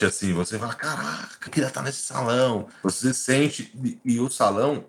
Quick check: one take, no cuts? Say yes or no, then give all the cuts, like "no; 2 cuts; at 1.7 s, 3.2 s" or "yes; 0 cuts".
no; 1 cut; at 1.5 s